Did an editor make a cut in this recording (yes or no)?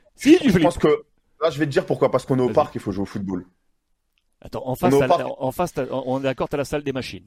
no